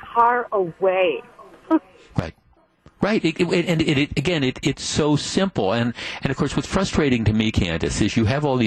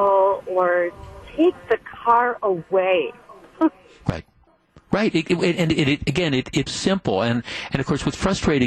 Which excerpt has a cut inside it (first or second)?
second